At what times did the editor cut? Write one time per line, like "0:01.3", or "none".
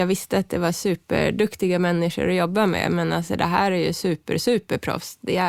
none